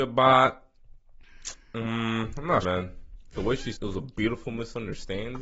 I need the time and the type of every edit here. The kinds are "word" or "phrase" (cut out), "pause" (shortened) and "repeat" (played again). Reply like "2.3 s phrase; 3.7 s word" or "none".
2.6 s word; 3.7 s word